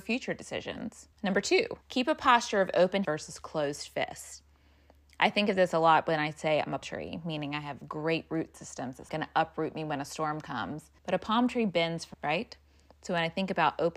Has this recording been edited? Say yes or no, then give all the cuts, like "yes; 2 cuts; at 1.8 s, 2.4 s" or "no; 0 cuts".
yes; 7 cuts; at 1.1 s, 1.8 s, 3.0 s, 6.8 s, 9.1 s, 11.0 s, 12.1 s